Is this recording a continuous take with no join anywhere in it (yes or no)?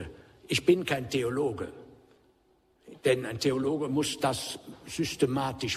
yes